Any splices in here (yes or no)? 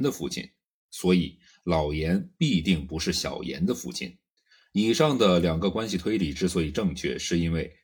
yes